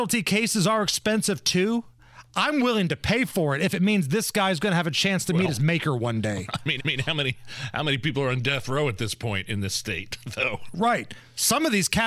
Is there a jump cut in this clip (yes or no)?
yes